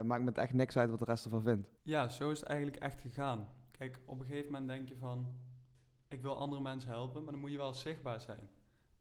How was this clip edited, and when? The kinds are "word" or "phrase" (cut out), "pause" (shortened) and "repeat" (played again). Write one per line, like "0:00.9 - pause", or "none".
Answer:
0:01.8 - pause